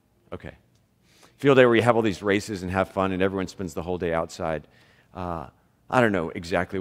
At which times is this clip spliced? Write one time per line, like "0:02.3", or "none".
none